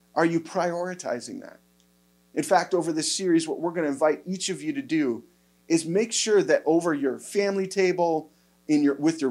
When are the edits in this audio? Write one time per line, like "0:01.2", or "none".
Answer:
none